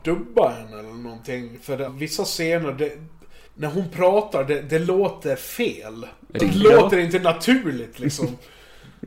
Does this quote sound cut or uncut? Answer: cut